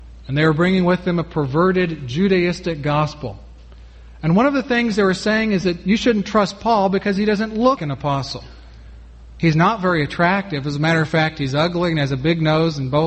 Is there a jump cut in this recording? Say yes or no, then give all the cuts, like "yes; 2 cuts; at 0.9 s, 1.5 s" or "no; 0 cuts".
yes; 1 cut; at 7.8 s